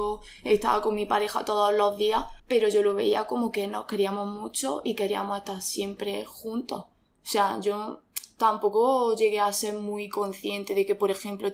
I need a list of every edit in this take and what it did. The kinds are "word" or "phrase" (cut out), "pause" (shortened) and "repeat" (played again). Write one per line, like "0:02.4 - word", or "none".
0:02.4 - pause